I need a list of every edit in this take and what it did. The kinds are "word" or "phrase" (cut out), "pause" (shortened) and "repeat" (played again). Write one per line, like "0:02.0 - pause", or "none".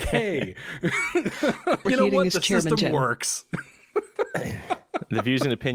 0:01.9 - word